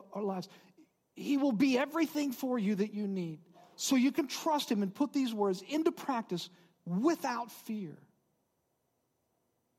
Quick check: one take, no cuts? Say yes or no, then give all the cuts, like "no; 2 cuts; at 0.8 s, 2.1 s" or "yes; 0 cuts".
yes; 0 cuts